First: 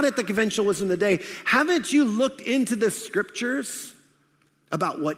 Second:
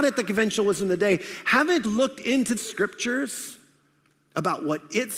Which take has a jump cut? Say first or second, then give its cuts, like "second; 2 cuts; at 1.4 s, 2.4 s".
second; 2 cuts; at 1.8 s, 2.6 s